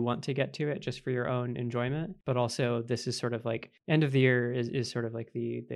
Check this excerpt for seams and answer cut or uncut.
uncut